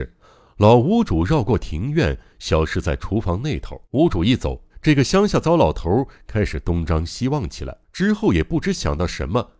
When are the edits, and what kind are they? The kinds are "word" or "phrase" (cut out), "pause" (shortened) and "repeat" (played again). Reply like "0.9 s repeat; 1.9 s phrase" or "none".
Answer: 3.8 s pause; 4.7 s pause; 7.8 s pause